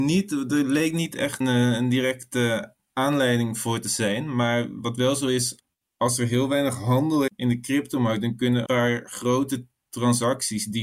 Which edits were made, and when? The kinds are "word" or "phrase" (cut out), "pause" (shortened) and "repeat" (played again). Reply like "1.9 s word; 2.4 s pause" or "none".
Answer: 1.4 s word; 7.3 s word; 8.7 s word